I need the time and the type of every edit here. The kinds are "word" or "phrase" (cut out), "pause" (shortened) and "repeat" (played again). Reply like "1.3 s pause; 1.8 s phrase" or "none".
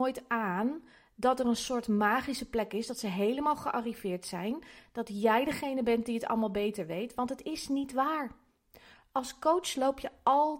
none